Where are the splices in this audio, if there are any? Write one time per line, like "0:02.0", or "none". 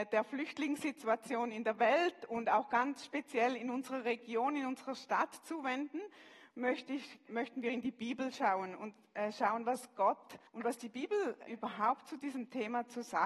0:07.3
0:10.5
0:11.5